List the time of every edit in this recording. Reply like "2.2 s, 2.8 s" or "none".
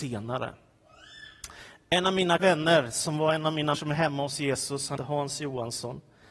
2.4 s, 3.7 s, 5.0 s